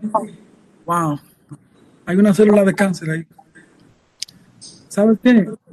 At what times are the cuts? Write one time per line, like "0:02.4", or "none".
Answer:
none